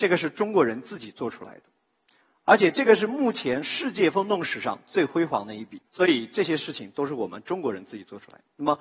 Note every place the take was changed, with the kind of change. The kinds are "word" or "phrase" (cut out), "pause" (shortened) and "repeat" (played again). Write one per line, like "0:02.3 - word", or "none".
0:05.9 - pause